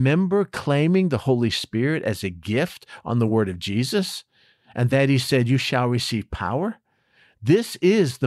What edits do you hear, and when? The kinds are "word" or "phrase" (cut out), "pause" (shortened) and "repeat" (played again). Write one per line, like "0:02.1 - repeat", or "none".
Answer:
none